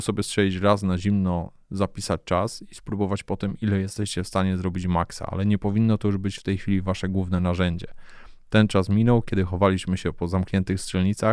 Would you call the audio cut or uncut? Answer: uncut